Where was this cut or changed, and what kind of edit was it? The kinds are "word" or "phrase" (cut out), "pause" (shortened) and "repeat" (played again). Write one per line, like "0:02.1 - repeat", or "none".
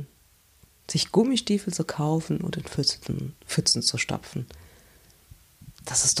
none